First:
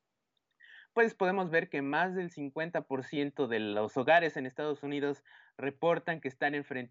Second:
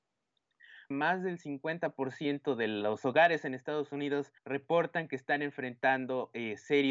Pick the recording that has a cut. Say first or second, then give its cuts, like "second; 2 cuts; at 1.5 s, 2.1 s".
second; 2 cuts; at 0.9 s, 4.4 s